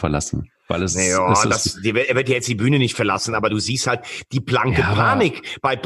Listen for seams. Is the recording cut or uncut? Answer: uncut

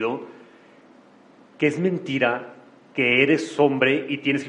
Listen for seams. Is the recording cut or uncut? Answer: uncut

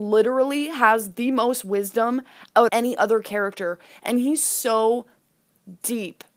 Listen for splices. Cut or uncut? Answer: cut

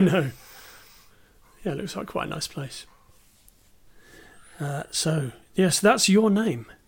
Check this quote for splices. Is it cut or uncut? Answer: uncut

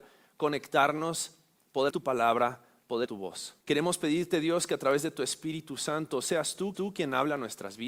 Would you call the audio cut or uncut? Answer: cut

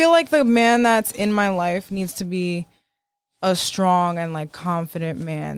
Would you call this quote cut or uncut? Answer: uncut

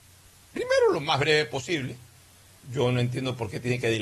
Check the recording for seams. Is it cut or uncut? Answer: uncut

